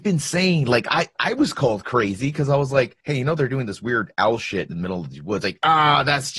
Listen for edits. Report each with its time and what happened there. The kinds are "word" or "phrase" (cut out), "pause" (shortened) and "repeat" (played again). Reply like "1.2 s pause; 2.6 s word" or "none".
1.1 s word; 3.0 s pause